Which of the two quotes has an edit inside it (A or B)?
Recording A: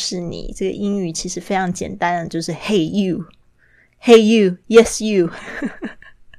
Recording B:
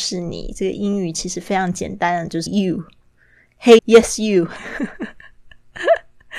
B